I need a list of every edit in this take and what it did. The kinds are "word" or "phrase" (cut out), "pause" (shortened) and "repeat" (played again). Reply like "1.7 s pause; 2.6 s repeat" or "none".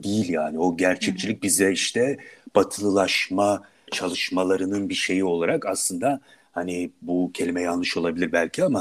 3.9 s word